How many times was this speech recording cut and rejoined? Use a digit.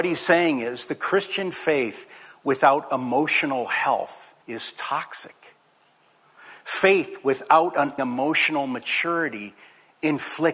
2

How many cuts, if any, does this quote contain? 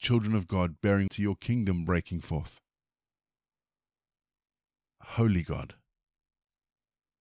1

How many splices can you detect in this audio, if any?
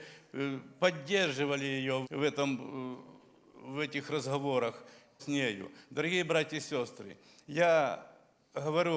2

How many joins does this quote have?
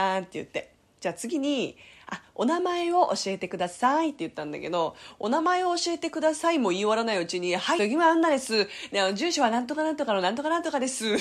1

